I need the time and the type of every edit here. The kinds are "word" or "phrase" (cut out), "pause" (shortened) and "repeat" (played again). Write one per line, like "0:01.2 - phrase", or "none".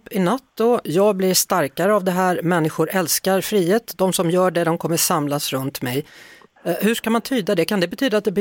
none